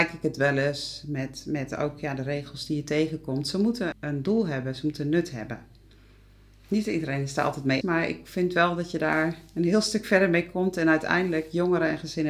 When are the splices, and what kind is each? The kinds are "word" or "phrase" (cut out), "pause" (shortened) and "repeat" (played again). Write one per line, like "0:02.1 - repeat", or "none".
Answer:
0:03.9 - word
0:07.8 - word